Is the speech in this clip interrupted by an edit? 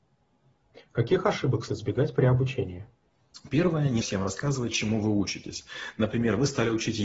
yes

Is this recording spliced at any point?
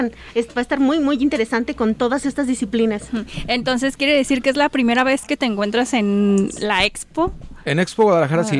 no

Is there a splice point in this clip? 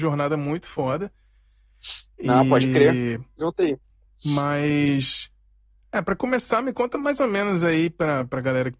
no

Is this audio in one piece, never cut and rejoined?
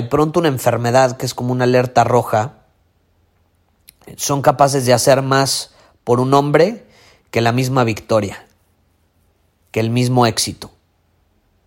yes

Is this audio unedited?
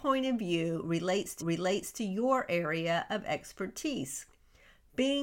no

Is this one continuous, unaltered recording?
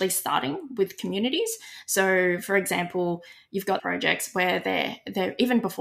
no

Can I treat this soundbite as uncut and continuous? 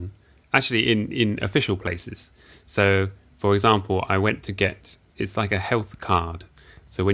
no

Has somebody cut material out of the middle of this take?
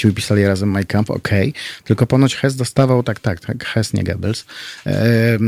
no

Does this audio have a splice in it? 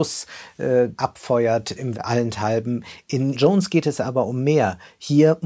yes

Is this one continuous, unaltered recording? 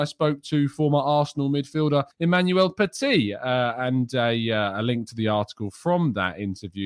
no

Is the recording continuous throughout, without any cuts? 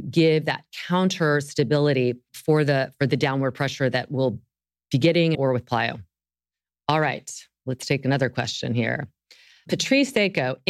no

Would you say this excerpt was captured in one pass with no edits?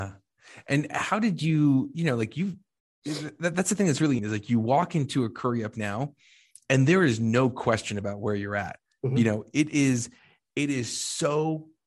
no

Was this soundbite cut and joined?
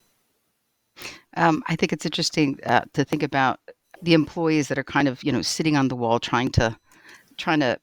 yes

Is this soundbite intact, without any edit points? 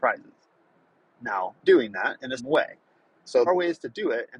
no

